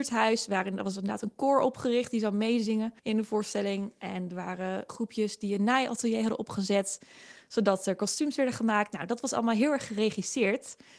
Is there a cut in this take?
yes; 2 cuts; at 3.0 s, 4.9 s

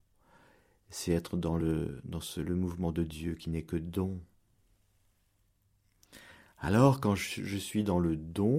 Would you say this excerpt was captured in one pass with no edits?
yes; 0 cuts

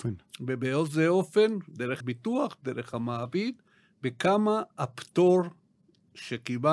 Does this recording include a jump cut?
yes; 1 cut; at 2.0 s

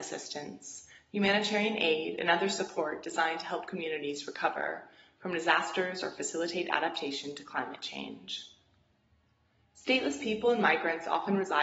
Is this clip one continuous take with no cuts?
yes; 0 cuts

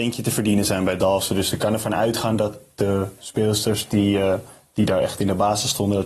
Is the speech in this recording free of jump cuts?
yes; 0 cuts

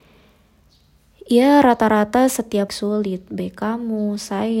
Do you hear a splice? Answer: yes; 1 cut; at 2.7 s

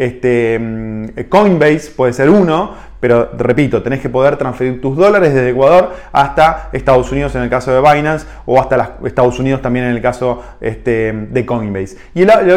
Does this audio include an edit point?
no; 0 cuts

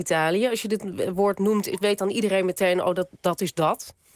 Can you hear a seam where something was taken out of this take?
no; 0 cuts

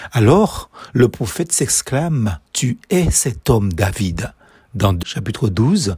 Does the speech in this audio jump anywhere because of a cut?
yes; 2 cuts; at 2.5 s, 5.0 s

